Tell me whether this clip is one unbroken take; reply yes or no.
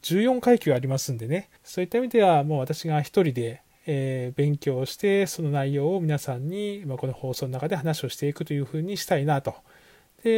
no